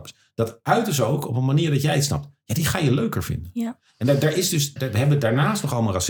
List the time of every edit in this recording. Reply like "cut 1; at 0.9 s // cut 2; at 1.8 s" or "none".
cut 1; at 4.8 s